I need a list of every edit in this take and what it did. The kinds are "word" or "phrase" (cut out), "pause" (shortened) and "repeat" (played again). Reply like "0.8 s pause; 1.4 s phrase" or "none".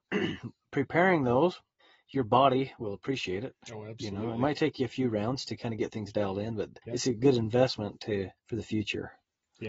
1.8 s pause; 6.8 s pause; 8.4 s pause